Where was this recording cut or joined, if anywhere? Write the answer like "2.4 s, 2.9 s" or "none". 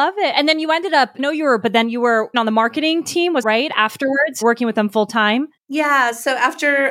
1.2 s, 1.6 s, 2.3 s, 3.4 s, 4.4 s, 5.6 s